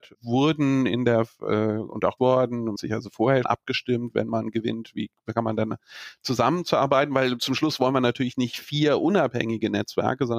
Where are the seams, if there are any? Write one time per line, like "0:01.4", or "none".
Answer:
0:02.2
0:02.8
0:03.4